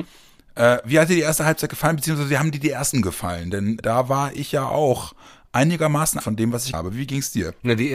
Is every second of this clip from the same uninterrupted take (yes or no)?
no